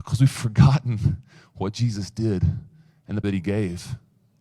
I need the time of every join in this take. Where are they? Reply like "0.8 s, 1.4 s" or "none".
3.2 s